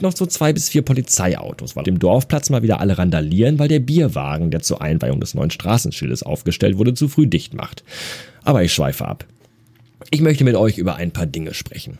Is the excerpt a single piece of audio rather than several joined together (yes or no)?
no